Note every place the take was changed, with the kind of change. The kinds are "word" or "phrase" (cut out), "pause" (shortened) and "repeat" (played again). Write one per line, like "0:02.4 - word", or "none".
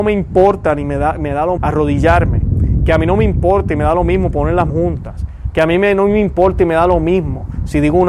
0:01.6 - word
0:04.7 - word